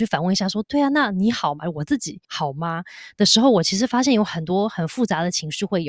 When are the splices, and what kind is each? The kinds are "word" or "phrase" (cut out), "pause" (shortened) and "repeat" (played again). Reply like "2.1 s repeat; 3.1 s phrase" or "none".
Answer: 2.2 s pause